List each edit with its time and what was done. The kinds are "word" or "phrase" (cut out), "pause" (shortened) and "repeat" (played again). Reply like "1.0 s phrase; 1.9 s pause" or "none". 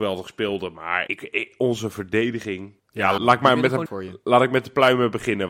1.1 s word; 2.8 s pause; 3.2 s word; 3.9 s phrase